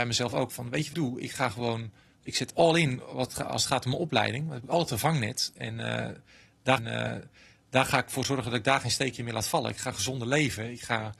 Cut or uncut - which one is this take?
cut